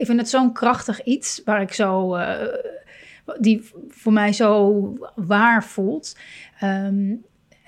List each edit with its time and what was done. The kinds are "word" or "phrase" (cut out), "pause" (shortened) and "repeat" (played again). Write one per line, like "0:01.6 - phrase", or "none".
none